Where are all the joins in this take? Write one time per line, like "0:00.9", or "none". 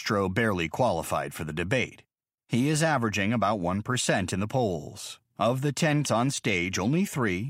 0:06.0